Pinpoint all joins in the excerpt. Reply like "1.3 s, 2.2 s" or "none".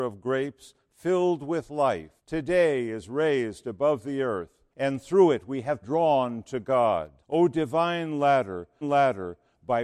2.2 s, 4.7 s, 5.8 s, 7.2 s, 8.8 s